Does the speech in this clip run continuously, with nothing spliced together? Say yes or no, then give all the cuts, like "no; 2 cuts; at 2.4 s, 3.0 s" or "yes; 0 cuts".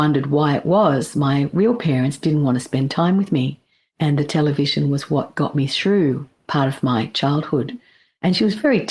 yes; 0 cuts